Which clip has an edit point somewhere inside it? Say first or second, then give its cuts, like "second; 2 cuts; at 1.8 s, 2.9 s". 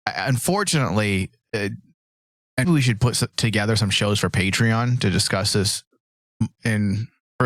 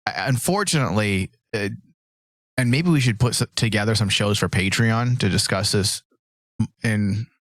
first; 1 cut; at 2.6 s